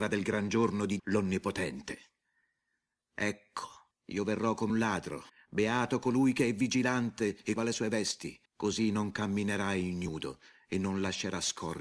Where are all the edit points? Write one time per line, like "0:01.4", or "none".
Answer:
0:01.0
0:03.9
0:04.7
0:05.3
0:07.6
0:08.4